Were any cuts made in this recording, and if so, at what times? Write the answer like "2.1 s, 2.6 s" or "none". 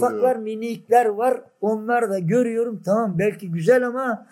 none